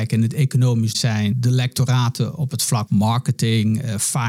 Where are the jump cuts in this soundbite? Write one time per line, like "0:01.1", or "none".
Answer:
0:00.9
0:01.3
0:02.9

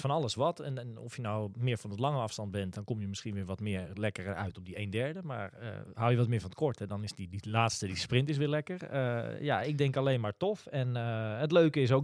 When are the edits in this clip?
none

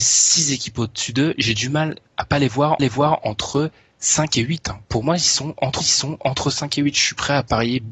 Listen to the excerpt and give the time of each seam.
0:02.8
0:05.8

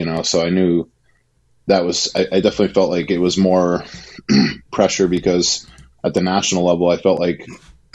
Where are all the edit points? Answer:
none

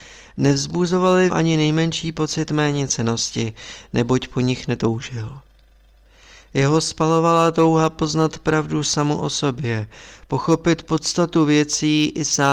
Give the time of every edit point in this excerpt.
0:01.3

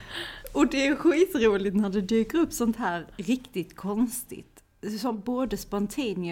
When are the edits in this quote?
0:03.1

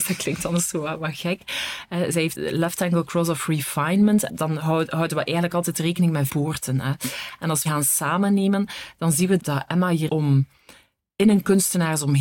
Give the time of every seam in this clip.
0:02.3
0:04.3
0:06.3
0:07.7
0:09.4
0:10.1

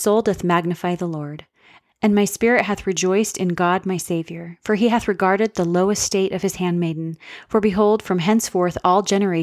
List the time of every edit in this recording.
none

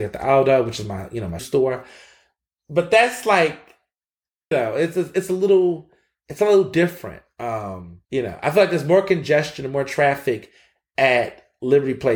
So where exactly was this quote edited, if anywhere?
0:01.4
0:04.5
0:08.0

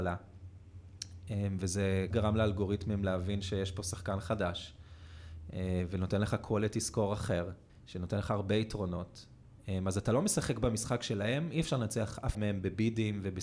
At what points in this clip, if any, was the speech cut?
0:02.1
0:07.7
0:12.3

